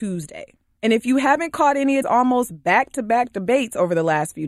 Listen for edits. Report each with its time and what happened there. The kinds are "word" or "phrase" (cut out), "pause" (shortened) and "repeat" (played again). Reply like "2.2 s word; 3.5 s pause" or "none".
2.0 s word